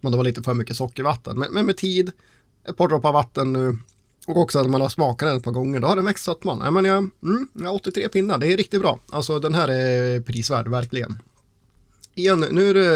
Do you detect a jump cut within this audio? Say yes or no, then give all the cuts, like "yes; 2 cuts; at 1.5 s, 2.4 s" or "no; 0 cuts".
no; 0 cuts